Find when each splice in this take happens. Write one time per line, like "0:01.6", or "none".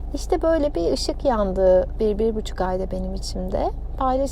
0:01.9